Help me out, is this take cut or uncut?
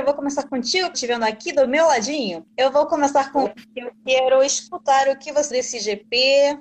cut